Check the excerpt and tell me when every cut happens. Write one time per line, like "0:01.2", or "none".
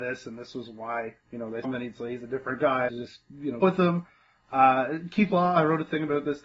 0:01.2
0:01.6
0:02.9
0:03.6